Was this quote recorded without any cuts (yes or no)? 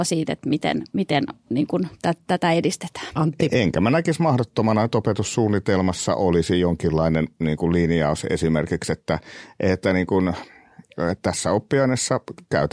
yes